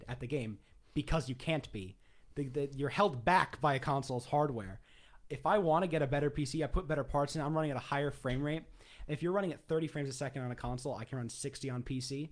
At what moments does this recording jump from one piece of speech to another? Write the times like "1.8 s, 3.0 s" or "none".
none